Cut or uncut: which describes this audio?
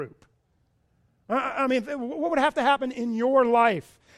uncut